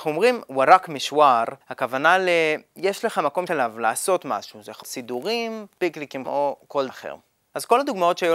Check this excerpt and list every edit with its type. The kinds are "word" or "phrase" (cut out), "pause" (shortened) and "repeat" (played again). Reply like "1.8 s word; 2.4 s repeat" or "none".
1.6 s pause; 3.5 s phrase; 4.8 s word; 6.2 s word; 6.9 s word